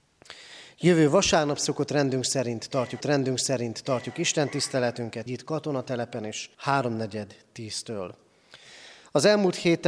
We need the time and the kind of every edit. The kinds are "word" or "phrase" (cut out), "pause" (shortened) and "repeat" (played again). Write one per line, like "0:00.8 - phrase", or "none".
0:03.0 - repeat
0:05.3 - word
0:06.5 - pause